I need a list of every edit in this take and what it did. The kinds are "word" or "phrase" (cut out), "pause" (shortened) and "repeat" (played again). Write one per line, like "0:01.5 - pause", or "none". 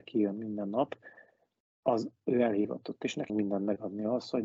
0:03.3 - word